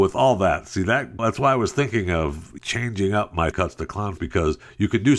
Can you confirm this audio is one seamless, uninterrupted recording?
no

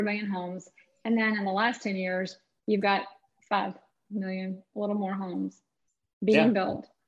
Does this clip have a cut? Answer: no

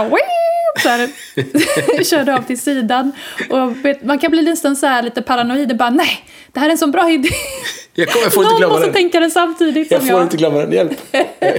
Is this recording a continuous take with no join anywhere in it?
yes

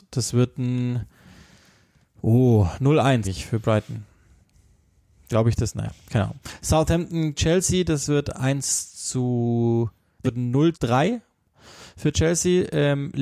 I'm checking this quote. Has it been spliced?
yes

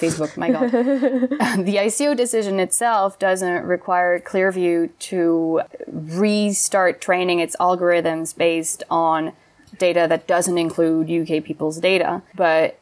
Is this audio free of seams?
yes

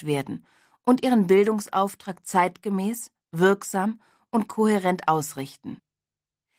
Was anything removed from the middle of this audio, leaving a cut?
no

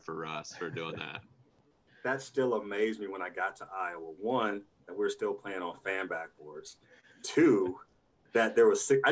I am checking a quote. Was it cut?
no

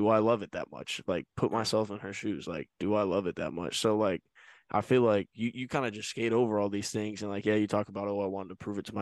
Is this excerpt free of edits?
yes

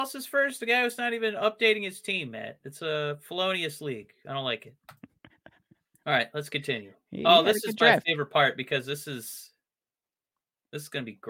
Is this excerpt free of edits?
yes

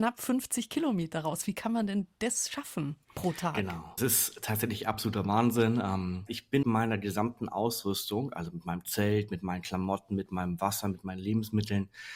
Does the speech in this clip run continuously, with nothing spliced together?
no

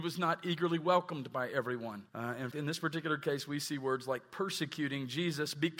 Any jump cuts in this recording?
yes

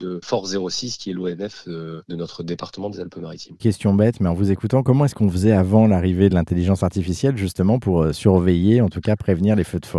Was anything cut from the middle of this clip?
no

